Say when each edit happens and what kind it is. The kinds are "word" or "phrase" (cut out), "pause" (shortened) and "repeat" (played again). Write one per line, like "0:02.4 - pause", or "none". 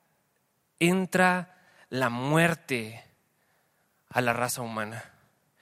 none